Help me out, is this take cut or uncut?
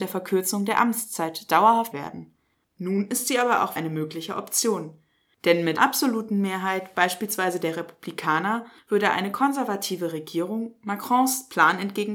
cut